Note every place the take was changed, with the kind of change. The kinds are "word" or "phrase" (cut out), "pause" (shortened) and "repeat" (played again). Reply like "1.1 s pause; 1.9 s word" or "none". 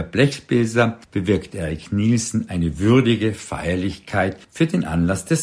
1.0 s pause; 4.4 s pause